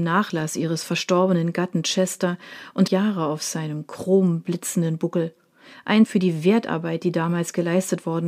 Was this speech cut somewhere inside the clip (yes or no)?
yes